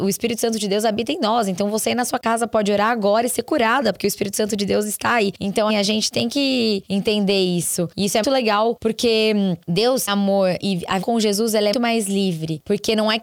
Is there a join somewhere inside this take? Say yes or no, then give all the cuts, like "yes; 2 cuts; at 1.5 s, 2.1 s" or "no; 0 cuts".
yes; 5 cuts; at 5.7 s, 8.2 s, 10.1 s, 11.0 s, 11.7 s